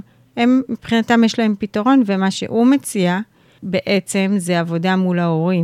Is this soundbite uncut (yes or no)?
yes